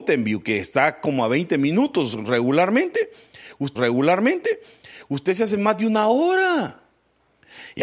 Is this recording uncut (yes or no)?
no